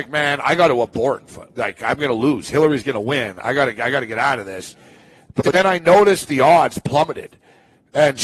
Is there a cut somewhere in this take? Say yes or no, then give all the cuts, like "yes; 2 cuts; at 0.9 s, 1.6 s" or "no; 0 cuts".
no; 0 cuts